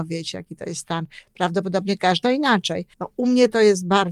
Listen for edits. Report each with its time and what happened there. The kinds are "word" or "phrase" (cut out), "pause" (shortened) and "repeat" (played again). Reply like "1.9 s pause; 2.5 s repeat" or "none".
2.2 s phrase; 2.9 s pause

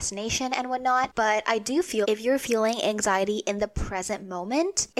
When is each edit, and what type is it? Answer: 2.0 s word

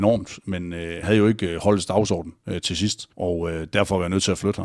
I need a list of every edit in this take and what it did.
1.0 s word; 3.1 s pause

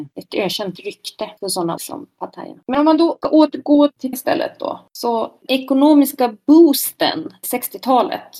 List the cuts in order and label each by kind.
1.8 s word; 3.2 s word; 4.1 s word; 5.5 s word; 7.4 s word

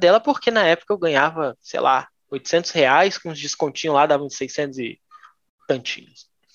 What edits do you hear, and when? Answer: none

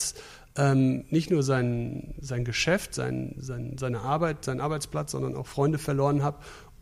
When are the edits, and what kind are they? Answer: none

